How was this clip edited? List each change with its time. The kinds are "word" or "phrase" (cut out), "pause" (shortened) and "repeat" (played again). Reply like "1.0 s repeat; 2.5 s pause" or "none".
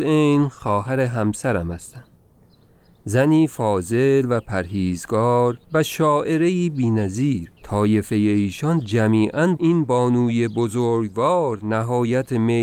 5.6 s pause; 7.6 s pause; 9.6 s phrase